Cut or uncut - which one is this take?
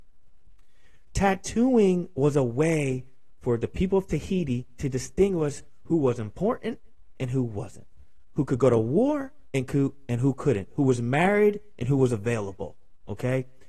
uncut